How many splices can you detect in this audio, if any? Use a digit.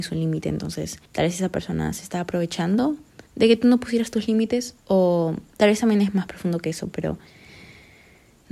3